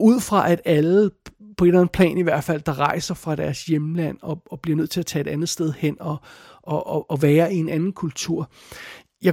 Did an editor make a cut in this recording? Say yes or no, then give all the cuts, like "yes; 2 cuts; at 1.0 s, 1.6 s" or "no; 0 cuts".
no; 0 cuts